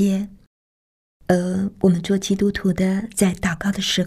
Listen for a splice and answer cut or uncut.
uncut